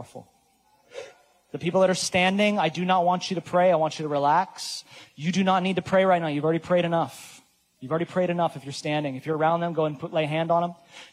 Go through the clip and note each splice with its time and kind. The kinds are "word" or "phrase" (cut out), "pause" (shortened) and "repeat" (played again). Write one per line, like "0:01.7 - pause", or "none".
none